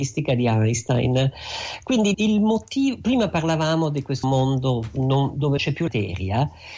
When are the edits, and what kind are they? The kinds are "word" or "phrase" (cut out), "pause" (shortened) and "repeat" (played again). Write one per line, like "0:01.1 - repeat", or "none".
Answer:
0:02.1 - word
0:04.2 - word
0:05.6 - word
0:05.9 - word